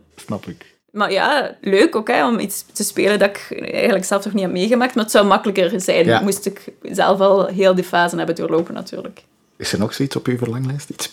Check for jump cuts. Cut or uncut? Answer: uncut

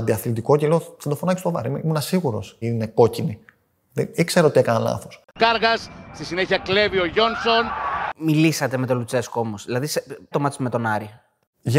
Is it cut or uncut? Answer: cut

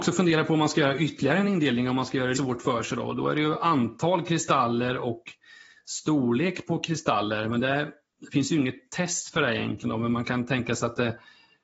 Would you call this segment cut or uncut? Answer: cut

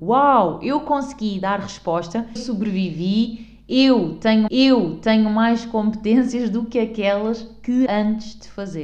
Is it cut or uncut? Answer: cut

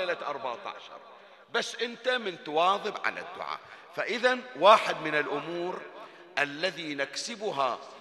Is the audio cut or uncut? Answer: uncut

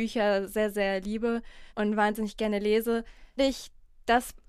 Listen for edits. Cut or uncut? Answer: cut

